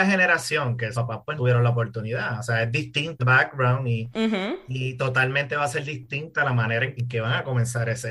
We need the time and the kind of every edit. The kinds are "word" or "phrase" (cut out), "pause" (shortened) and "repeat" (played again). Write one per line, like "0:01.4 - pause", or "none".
0:00.9 - word
0:01.4 - word
0:03.2 - word
0:07.0 - word